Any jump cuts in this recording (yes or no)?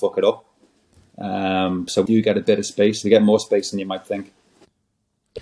yes